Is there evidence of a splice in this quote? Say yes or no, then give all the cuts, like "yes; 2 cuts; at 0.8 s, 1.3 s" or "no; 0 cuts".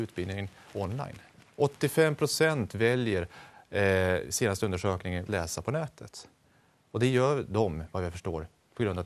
yes; 1 cut; at 5.3 s